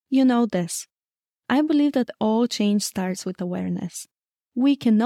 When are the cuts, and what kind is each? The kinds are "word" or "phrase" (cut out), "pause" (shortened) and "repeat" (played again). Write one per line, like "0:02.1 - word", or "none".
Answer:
none